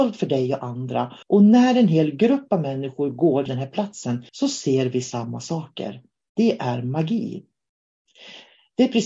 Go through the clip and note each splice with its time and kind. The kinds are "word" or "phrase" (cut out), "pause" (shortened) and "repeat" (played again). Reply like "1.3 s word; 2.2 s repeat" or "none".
1.2 s pause; 3.5 s word; 4.3 s pause